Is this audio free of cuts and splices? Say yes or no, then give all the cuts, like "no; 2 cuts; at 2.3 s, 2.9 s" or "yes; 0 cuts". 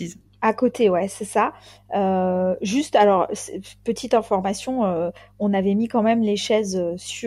yes; 0 cuts